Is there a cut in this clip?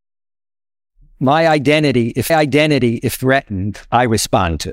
yes; 1 cut; at 2.3 s

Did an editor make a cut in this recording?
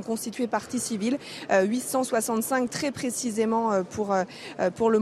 no; 0 cuts

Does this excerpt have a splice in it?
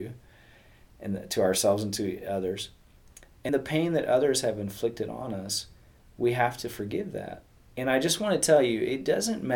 yes; 1 cut; at 3.5 s

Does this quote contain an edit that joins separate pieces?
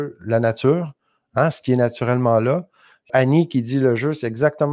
yes; 1 cut; at 3.1 s

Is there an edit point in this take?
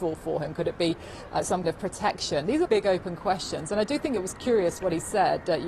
yes; 3 cuts; at 1.3 s, 1.6 s, 2.6 s

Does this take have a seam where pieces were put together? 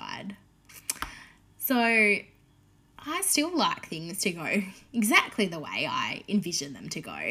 no; 0 cuts

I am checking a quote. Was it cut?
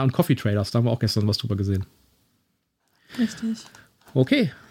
no; 0 cuts

